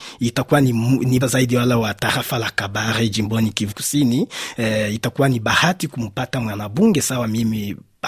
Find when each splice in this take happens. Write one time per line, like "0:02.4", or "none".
0:01.2
0:03.7